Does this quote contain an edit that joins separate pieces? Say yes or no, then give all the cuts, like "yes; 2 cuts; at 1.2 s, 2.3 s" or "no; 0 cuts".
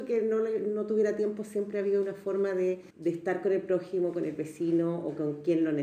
yes; 1 cut; at 2.9 s